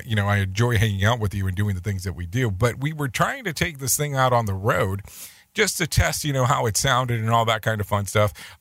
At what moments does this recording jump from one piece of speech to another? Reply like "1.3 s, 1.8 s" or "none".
none

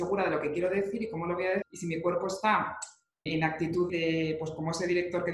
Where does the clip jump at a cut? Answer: 1.6 s, 3.3 s, 3.9 s

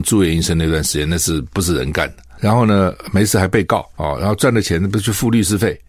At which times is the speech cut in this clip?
3.9 s

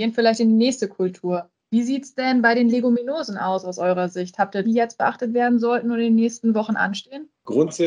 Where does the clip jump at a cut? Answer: 4.6 s

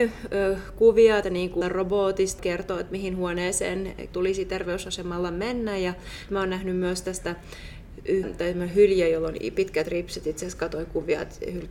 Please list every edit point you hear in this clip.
1.2 s, 1.6 s, 2.4 s, 4.1 s, 6.3 s, 8.2 s

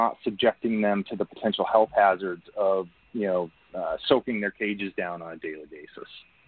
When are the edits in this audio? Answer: none

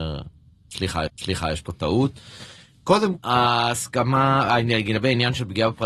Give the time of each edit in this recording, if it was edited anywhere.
1.1 s, 3.2 s

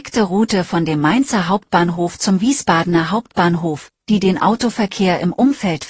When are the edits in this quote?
none

